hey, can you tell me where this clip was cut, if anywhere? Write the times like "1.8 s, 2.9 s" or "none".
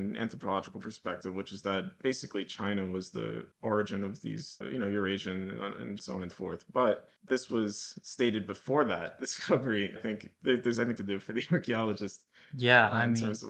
3.5 s, 4.6 s, 6.0 s, 6.3 s, 7.3 s, 10.0 s, 11.0 s